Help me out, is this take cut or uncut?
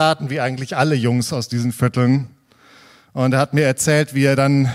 uncut